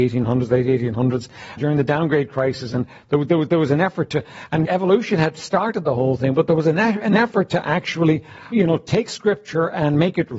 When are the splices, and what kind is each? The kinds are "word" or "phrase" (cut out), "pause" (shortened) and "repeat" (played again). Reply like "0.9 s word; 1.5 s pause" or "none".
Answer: 1.6 s word; 4.6 s word; 8.5 s word

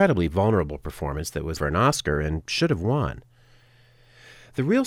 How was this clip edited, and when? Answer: 1.5 s word

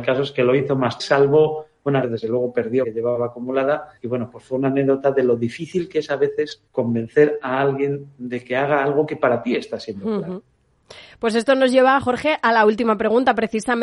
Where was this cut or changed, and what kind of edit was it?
1.0 s word; 2.0 s phrase; 2.8 s phrase; 4.0 s pause; 6.7 s pause

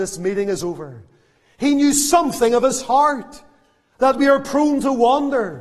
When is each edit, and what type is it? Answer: none

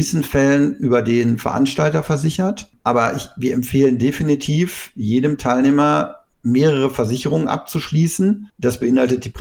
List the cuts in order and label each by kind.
6.3 s pause

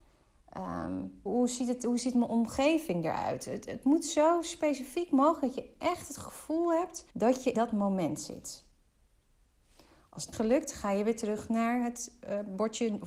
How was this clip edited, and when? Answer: 1.3 s word; 7.1 s pause; 7.5 s word; 10.3 s phrase

